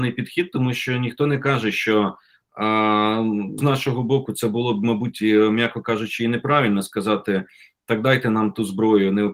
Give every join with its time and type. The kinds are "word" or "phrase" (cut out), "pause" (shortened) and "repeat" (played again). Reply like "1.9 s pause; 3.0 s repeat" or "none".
3.6 s word